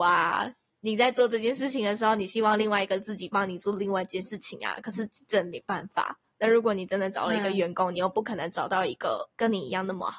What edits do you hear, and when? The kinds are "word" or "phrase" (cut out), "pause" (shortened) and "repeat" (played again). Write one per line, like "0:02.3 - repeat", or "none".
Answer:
none